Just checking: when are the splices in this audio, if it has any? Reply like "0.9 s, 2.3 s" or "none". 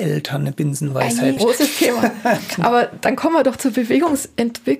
1.4 s